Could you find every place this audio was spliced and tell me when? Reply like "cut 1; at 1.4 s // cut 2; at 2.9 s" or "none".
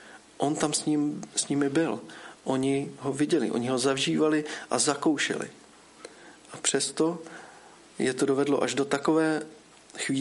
none